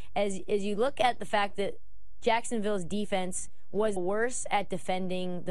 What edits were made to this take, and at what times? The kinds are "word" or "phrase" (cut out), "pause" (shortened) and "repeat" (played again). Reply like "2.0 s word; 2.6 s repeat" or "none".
4.0 s word

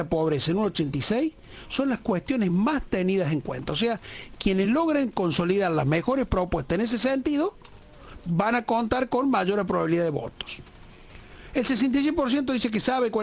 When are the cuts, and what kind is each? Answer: none

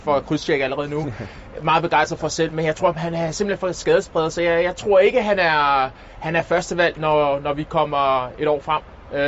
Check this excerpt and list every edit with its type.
none

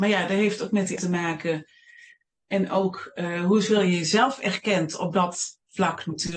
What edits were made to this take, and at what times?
1.0 s word

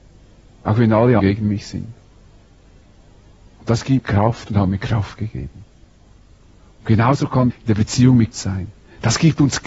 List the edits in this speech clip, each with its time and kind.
1.2 s word; 4.0 s word; 7.5 s word; 8.3 s word

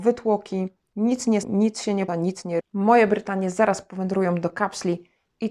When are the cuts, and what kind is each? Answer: 1.4 s word; 2.1 s word; 2.6 s word

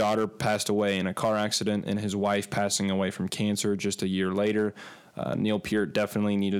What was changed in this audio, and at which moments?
none

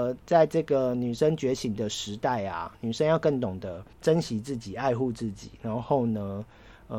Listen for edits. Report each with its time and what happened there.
3.9 s pause

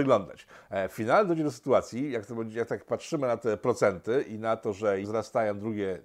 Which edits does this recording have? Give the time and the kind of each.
5.0 s word

